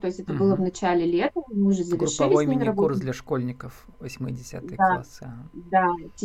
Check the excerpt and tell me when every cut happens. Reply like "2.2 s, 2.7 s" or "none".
none